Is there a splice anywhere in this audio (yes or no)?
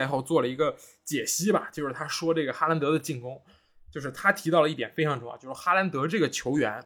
no